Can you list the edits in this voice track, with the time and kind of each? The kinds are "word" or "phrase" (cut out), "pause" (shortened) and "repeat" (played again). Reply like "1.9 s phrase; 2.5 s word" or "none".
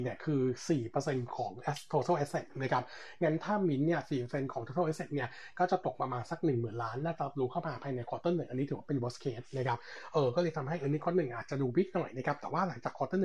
none